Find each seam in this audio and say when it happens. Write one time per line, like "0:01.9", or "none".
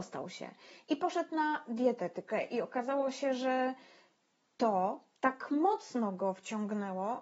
none